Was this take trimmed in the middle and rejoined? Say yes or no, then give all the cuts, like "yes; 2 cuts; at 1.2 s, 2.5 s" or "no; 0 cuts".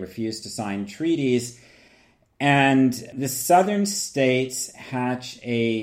no; 0 cuts